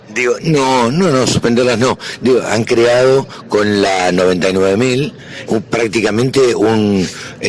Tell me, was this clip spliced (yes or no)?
yes